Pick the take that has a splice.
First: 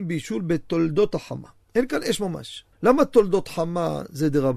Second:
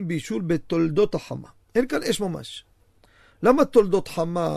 first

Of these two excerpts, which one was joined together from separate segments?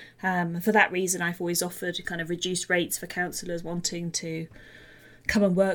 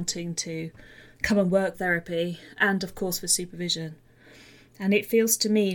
second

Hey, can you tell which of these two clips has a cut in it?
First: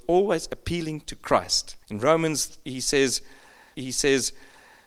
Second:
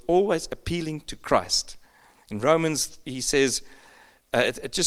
first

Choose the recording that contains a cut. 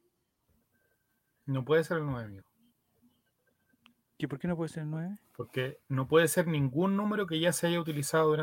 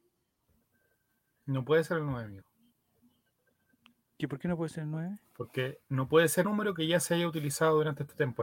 second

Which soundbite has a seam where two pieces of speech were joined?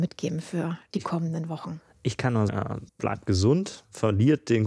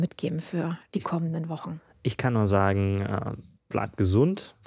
first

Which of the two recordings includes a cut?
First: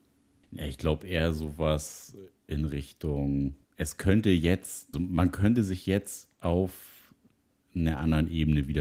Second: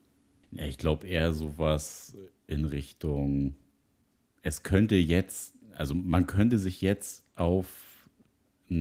first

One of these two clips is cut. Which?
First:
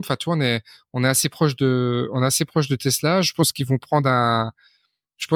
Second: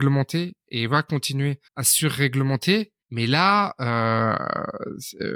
second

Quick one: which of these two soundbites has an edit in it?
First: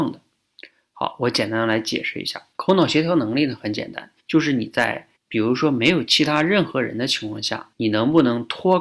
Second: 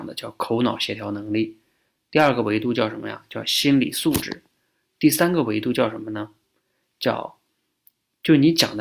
first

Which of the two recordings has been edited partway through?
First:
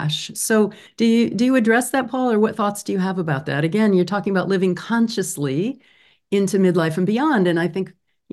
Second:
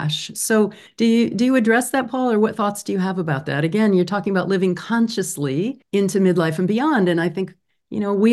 second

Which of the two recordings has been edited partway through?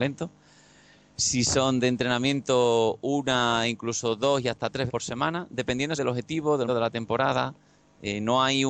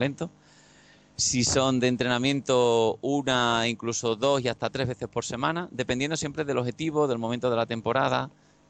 first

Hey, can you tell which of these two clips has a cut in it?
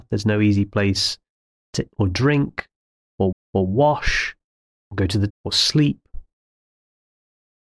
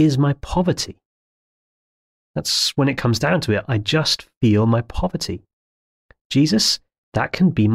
first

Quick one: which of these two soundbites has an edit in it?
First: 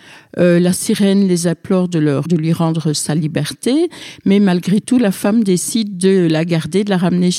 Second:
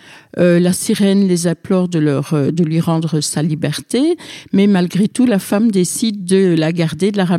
first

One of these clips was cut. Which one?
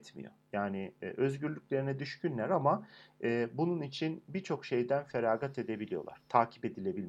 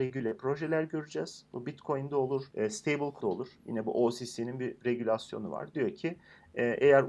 second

